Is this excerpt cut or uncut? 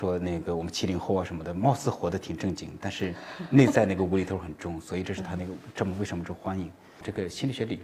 uncut